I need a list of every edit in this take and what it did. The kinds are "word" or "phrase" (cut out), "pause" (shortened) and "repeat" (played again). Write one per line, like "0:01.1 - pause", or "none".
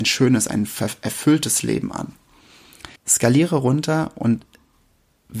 0:03.0 - pause

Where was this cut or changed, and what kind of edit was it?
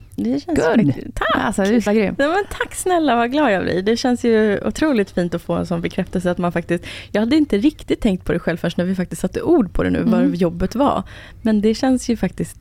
0:01.9 - word

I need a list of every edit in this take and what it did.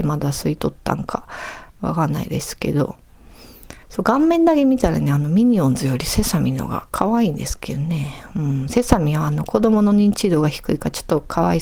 0:01.7 - pause
0:03.8 - pause

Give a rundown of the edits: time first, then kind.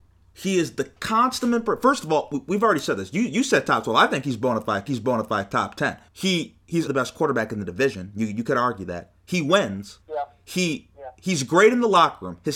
0:04.9 - repeat
0:06.1 - pause
0:06.9 - word
0:10.0 - pause

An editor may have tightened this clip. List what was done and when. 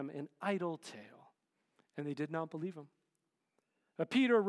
none

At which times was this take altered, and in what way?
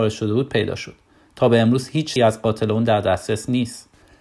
0:02.2 - word

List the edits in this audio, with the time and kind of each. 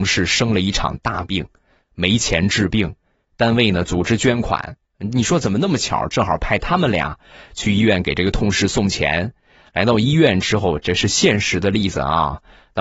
none

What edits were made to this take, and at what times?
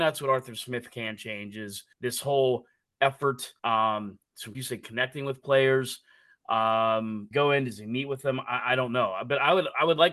0:01.9 - pause
0:03.6 - pause
0:04.5 - phrase
0:07.3 - phrase

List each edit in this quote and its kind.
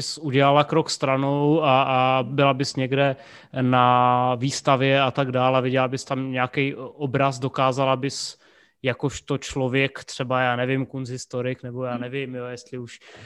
none

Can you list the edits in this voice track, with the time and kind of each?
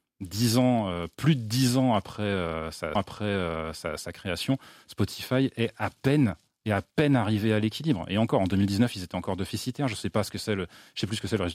0:03.0 - repeat

